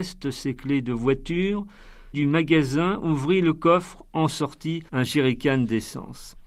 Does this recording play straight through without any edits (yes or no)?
no